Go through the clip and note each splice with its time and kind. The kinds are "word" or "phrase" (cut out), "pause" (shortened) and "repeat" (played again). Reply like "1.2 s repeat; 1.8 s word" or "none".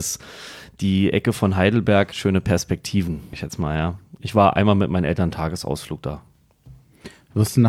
2.1 s word; 3.3 s word